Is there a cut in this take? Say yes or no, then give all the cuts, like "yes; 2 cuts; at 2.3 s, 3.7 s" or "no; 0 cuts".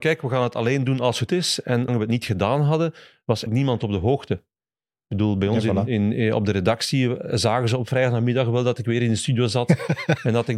yes; 3 cuts; at 1.3 s, 1.9 s, 3.5 s